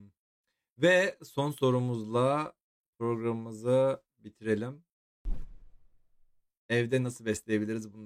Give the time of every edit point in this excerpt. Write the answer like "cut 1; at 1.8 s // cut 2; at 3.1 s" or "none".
none

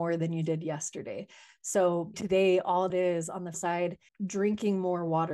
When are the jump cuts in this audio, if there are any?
cut 1; at 2.1 s // cut 2; at 2.9 s // cut 3; at 3.5 s // cut 4; at 4.1 s

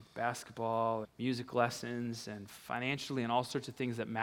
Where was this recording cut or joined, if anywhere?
cut 1; at 1.0 s

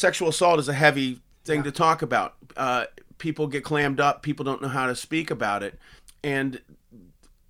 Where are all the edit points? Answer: cut 1; at 6.0 s

